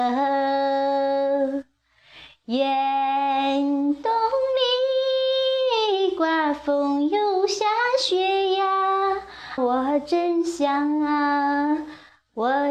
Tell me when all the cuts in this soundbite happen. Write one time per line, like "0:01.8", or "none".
0:09.6